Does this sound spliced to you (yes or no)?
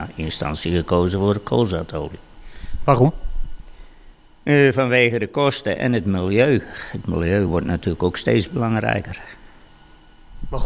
no